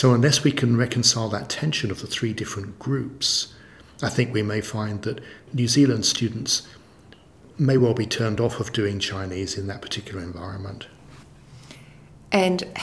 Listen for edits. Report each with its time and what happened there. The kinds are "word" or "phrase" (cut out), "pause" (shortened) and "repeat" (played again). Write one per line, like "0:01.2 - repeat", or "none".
none